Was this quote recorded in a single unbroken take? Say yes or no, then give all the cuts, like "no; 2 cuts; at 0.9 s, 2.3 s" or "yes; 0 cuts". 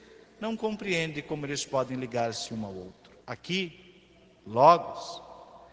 no; 1 cut; at 3.2 s